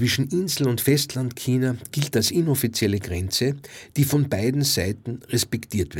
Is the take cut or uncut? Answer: uncut